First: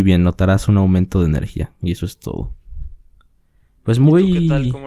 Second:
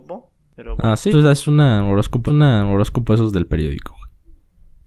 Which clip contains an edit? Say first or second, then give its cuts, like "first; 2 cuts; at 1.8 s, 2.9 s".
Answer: second; 2 cuts; at 1.1 s, 2.3 s